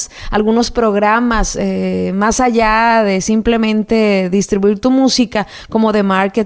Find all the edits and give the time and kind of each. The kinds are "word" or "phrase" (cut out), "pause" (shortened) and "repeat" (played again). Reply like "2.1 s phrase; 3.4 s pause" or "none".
none